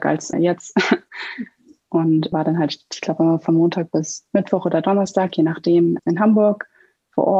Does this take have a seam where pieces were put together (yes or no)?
no